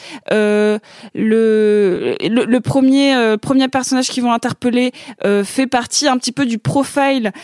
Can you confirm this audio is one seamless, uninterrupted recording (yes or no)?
yes